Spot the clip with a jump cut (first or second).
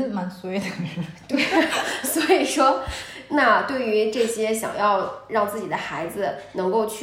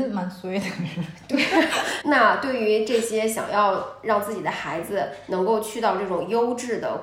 second